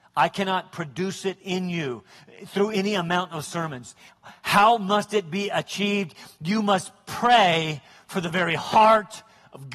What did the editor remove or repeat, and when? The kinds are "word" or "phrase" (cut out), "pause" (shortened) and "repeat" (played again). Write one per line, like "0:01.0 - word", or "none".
none